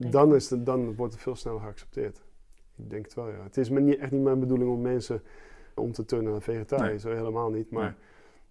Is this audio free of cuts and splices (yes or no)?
no